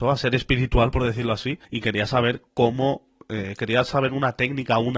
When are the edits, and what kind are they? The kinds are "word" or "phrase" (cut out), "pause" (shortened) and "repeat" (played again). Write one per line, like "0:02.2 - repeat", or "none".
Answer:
0:01.6 - pause